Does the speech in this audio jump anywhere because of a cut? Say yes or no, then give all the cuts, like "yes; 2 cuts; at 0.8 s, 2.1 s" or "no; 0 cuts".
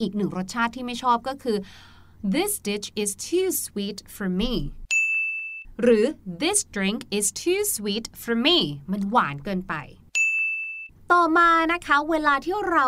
no; 0 cuts